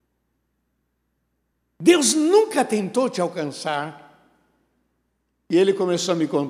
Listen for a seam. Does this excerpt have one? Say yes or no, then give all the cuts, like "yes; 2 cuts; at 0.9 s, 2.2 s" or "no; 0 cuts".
no; 0 cuts